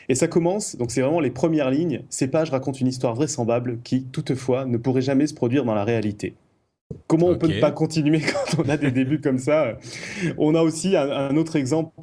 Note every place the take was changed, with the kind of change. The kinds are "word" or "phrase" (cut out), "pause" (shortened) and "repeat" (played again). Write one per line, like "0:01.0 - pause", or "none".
0:07.0 - pause

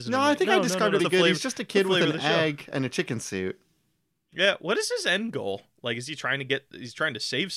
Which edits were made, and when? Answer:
0:01.0 - word

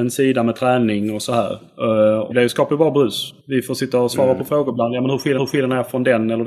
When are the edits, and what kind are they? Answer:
0:02.3 - word
0:03.4 - pause
0:05.4 - repeat

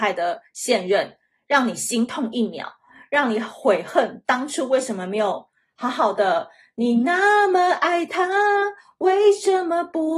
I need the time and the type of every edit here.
none

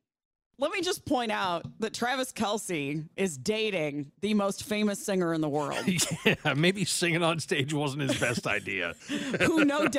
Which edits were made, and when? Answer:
0:01.8 - pause
0:03.1 - pause
0:04.1 - pause

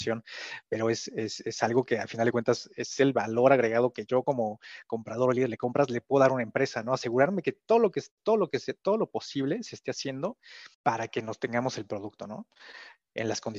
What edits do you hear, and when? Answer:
0:10.7 - pause

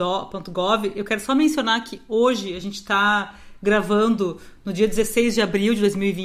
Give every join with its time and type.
none

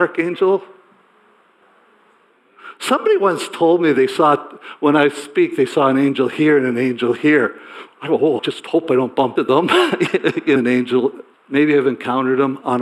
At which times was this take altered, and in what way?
0:08.4 - word
0:09.4 - word
0:10.6 - phrase
0:11.3 - pause

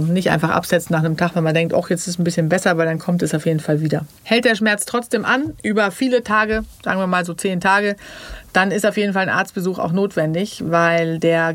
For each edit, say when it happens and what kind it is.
0:04.2 - pause

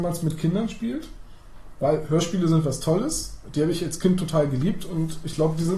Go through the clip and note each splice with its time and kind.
none

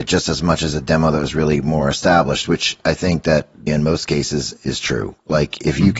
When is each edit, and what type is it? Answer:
0:03.7 - word

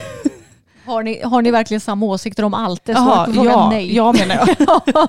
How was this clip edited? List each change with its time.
none

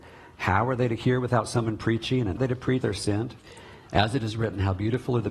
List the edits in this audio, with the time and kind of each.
0:02.4 - phrase
0:02.8 - word

